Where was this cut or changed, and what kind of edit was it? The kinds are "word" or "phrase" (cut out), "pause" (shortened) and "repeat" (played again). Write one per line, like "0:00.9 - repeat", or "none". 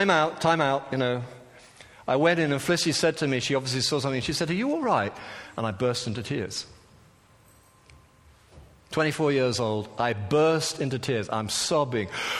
none